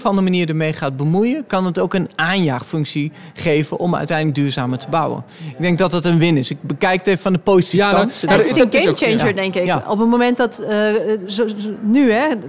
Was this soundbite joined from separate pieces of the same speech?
no; 0 cuts

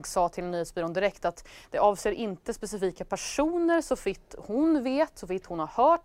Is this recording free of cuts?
yes; 0 cuts

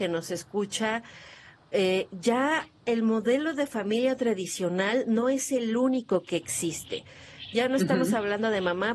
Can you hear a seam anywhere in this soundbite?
no; 0 cuts

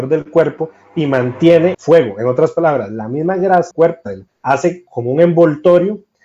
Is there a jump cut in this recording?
yes; 3 cuts; at 1.7 s, 3.7 s, 4.3 s

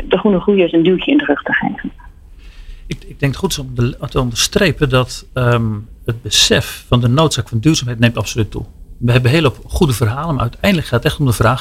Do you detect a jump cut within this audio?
no; 0 cuts

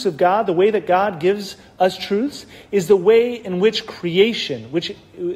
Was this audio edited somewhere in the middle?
no; 0 cuts

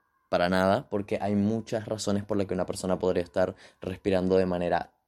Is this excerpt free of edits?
yes; 0 cuts

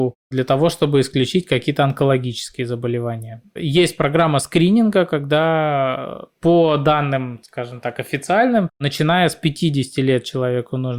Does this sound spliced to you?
no; 0 cuts

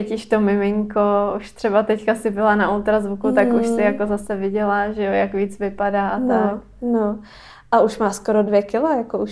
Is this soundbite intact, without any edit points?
yes; 0 cuts

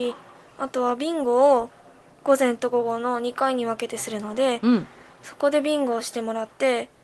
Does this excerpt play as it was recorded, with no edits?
yes; 0 cuts

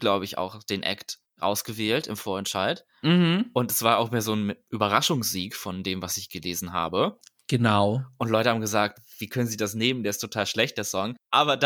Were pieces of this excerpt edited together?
no; 0 cuts

